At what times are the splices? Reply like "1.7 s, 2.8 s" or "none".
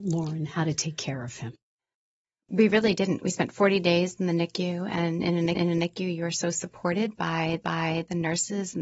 5.6 s, 7.6 s